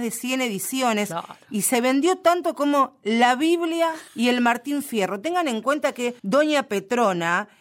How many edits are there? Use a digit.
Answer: 2